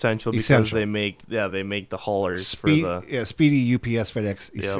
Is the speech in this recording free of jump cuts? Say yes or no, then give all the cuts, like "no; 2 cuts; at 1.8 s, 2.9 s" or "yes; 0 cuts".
yes; 0 cuts